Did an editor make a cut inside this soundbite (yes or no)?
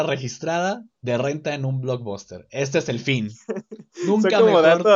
yes